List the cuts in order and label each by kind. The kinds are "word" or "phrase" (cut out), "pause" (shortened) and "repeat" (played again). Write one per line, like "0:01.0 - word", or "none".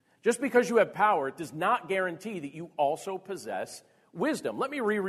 none